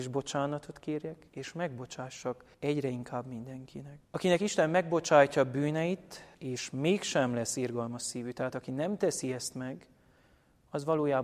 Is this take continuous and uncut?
no; 4 cuts; at 1.3 s, 2.5 s, 4.0 s, 6.3 s

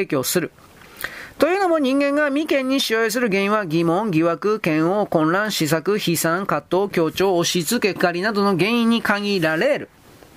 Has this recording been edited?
yes; 1 cut; at 8.0 s

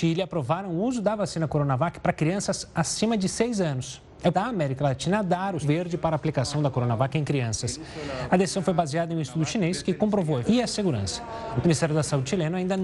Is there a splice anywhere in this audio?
yes; 3 cuts; at 4.3 s, 5.6 s, 10.4 s

